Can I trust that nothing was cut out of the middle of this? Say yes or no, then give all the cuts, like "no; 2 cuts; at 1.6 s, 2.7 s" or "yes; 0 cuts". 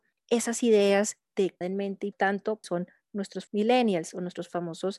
no; 4 cuts; at 1.6 s, 2.1 s, 2.6 s, 3.5 s